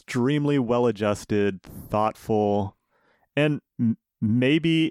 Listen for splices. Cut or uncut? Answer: cut